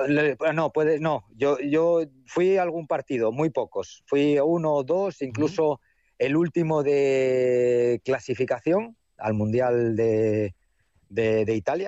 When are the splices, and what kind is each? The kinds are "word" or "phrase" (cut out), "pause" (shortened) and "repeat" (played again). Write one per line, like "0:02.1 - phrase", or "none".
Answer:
none